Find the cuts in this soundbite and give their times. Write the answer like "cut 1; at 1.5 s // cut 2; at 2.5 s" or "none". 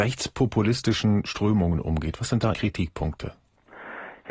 cut 1; at 2.5 s